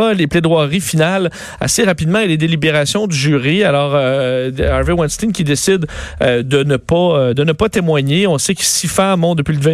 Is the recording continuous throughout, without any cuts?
yes; 0 cuts

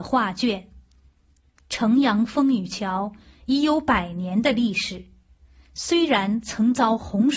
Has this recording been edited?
no; 0 cuts

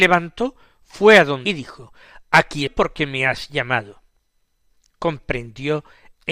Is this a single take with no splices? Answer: no; 2 cuts; at 1.4 s, 2.7 s

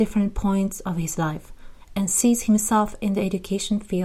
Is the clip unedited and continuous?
yes; 0 cuts

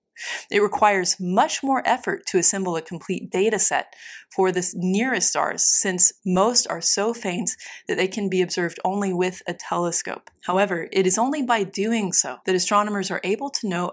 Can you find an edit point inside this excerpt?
yes; 3 cuts; at 6.2 s, 10.3 s, 12.4 s

